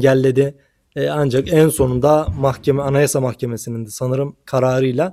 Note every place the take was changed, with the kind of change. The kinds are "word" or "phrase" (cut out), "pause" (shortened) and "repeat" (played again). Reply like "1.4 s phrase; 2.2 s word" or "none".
none